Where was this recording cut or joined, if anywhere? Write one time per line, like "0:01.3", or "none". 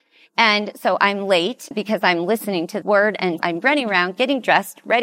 0:01.7
0:02.8
0:03.4